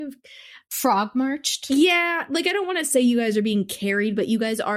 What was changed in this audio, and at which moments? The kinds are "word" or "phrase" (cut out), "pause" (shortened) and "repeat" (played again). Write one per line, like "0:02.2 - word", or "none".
none